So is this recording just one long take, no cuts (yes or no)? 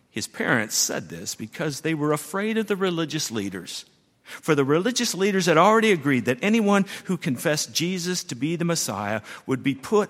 yes